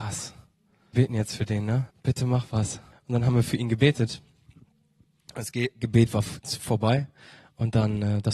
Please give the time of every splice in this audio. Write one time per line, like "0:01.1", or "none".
0:00.9
0:01.9
0:02.9